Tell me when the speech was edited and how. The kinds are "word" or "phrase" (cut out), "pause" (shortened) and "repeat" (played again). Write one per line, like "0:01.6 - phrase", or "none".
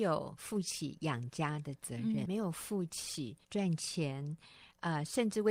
0:02.3 - word
0:03.4 - pause